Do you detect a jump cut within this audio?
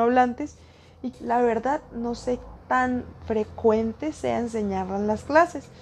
yes; 2 cuts; at 1.1 s, 2.6 s

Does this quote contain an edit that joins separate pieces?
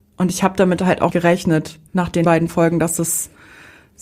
yes; 3 cuts; at 1.1 s, 1.9 s, 2.2 s

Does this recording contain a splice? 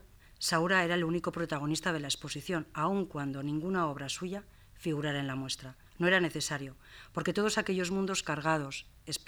yes; 1 cut; at 5.9 s

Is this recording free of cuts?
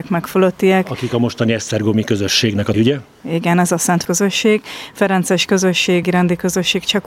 no; 3 cuts; at 2.7 s, 4.0 s, 6.0 s

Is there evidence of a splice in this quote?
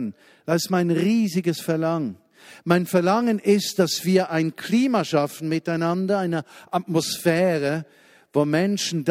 no; 0 cuts

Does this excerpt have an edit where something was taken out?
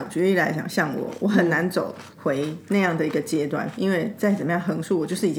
yes; 1 cut; at 2.1 s

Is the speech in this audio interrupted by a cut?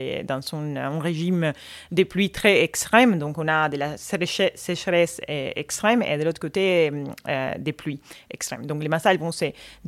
no; 0 cuts

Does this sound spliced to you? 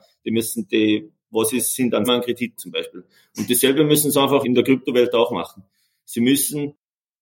yes; 3 cuts; at 2.0 s, 2.6 s, 4.4 s

